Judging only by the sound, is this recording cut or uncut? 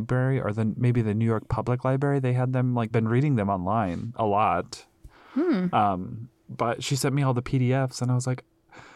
cut